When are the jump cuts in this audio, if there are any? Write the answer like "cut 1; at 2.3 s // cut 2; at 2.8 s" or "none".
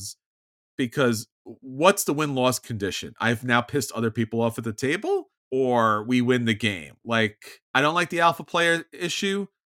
cut 1; at 1.3 s // cut 2; at 5.4 s // cut 3; at 7.6 s